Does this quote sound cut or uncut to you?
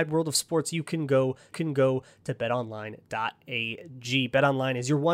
cut